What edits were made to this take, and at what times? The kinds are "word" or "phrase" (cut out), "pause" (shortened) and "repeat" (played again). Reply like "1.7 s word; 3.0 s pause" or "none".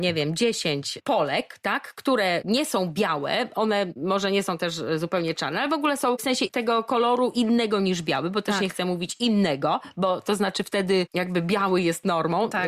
none